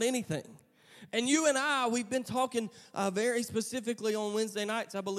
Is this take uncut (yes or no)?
yes